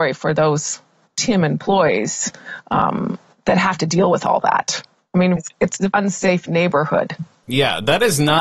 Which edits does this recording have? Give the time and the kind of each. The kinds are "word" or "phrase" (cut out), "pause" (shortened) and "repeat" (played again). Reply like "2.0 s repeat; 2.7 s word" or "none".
5.4 s word; 5.9 s word